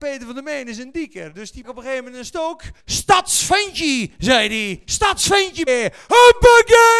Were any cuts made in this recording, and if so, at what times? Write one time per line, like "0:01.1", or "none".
0:01.6
0:02.8
0:05.7